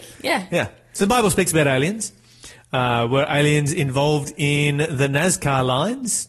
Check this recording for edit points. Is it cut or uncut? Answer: uncut